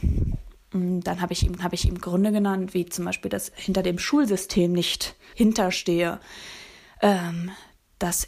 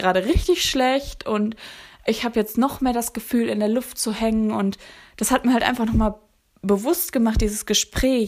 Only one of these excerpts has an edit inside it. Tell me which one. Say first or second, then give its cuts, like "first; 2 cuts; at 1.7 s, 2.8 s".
first; 3 cuts; at 1.6 s, 3.5 s, 5.3 s